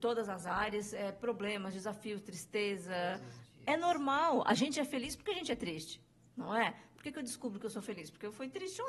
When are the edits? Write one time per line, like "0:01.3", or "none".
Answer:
none